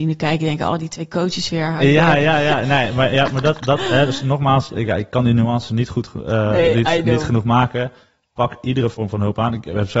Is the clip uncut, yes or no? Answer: yes